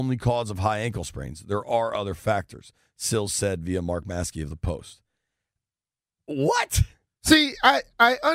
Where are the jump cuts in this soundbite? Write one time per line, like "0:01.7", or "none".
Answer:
none